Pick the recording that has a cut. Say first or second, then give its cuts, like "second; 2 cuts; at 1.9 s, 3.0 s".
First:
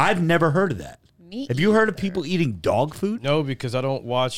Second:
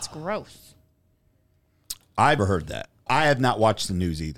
second; 2 cuts; at 2.4 s, 3.1 s